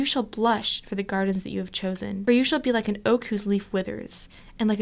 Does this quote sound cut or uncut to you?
uncut